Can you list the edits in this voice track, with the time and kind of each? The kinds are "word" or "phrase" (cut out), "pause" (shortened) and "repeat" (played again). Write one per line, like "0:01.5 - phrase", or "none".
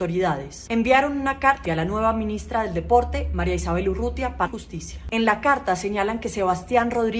0:01.6 - word
0:04.5 - word